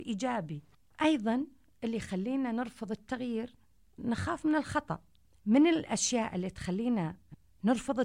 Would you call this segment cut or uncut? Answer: uncut